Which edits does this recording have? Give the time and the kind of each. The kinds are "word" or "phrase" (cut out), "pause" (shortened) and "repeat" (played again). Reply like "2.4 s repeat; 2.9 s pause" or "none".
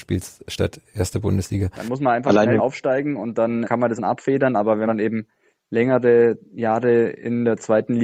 2.6 s word; 3.6 s word; 4.0 s word; 4.9 s word